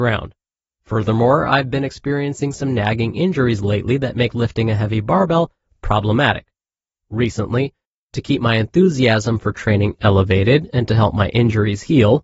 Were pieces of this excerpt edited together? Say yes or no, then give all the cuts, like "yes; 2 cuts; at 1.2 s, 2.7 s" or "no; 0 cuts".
no; 0 cuts